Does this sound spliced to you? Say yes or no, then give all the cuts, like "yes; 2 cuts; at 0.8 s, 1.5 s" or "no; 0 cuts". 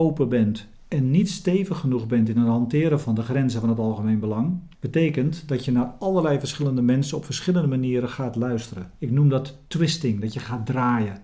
yes; 2 cuts; at 4.7 s, 8.9 s